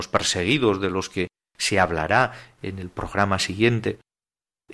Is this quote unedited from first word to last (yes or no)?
yes